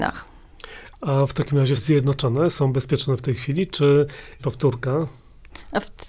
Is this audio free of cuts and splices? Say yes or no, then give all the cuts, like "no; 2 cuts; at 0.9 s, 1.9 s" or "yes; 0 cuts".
no; 2 cuts; at 1.8 s, 4.4 s